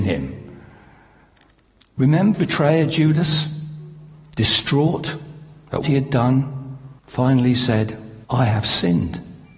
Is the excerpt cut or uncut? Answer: cut